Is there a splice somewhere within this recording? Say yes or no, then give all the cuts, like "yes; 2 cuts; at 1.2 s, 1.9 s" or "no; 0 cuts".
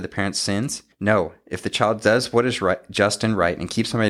yes; 1 cut; at 0.9 s